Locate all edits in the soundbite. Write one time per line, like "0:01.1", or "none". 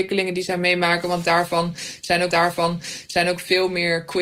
0:02.3